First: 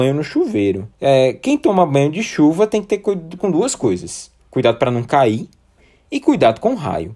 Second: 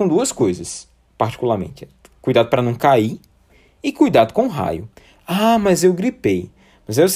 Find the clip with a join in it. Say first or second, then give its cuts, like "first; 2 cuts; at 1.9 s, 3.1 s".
first; 3 cuts; at 0.9 s, 3.4 s, 4.4 s